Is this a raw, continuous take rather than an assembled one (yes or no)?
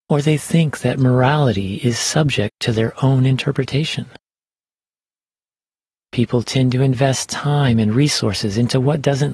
yes